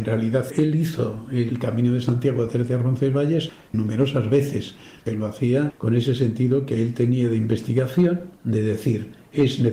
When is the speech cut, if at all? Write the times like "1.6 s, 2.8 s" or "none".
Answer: 8.4 s

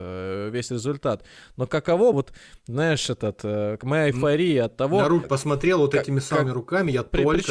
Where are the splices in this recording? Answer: 2.1 s, 5.2 s

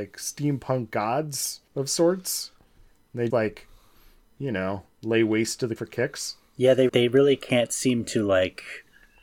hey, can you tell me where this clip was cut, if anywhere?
1.7 s, 3.3 s, 5.8 s, 6.9 s

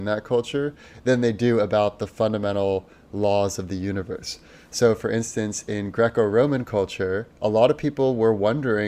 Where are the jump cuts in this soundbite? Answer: 7.3 s

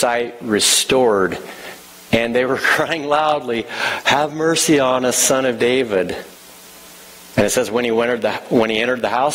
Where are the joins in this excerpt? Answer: none

